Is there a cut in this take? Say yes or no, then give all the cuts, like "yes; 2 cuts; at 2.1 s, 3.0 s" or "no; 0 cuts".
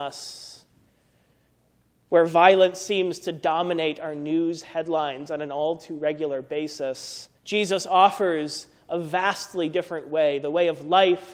yes; 1 cut; at 7.4 s